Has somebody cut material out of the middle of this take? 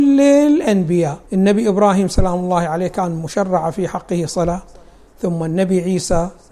yes; 1 cut; at 1.3 s

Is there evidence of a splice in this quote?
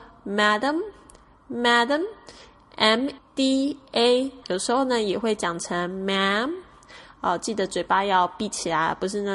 yes; 2 cuts; at 3.2 s, 4.4 s

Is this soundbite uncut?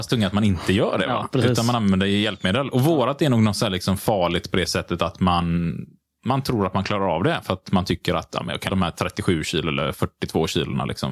no; 1 cut; at 8.7 s

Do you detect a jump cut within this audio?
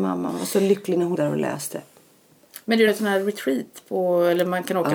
yes; 2 cuts; at 1.1 s, 2.9 s

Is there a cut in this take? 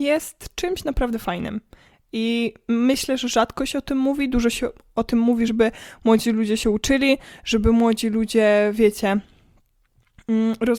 no; 0 cuts

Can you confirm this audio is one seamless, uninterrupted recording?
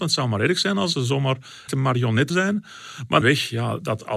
no; 3 cuts; at 1.7 s, 2.3 s, 3.2 s

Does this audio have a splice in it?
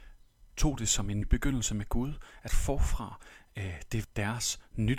yes; 3 cuts; at 1.2 s, 2.5 s, 4.0 s

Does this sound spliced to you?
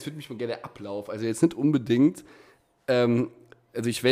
no; 0 cuts

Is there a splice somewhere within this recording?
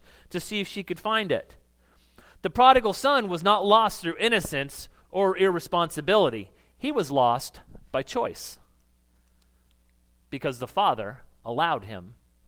no; 0 cuts

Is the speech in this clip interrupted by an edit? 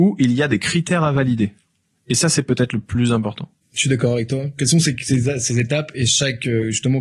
no; 0 cuts

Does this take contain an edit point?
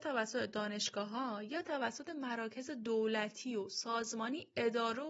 no; 0 cuts

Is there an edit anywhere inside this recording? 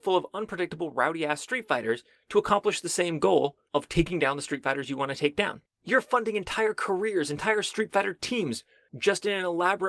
no; 0 cuts

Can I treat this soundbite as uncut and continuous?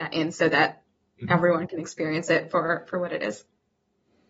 yes; 0 cuts

